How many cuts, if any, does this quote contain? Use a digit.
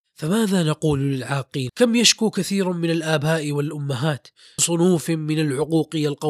2